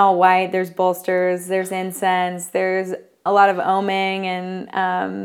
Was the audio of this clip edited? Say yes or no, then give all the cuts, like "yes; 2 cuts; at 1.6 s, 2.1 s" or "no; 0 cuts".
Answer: yes; 1 cut; at 3.3 s